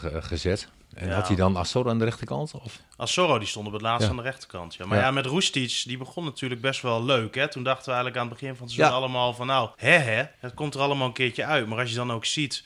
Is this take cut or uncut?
cut